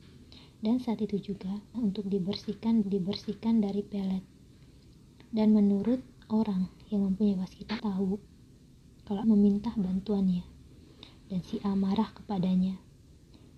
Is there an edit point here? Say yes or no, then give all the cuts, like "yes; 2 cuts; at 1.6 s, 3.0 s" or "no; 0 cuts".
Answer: yes; 4 cuts; at 1.7 s, 2.8 s, 7.8 s, 9.2 s